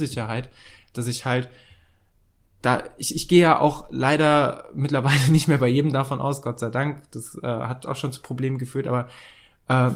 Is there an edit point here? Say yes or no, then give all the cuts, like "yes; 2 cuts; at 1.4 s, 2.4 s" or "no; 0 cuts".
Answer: no; 0 cuts